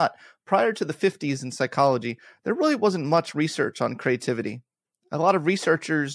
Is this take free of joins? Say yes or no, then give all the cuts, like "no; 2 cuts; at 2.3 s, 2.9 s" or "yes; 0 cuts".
yes; 0 cuts